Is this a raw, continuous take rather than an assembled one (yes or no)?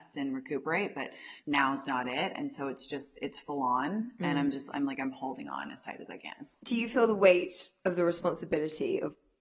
yes